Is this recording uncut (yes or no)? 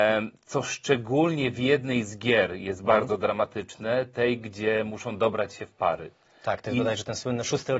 yes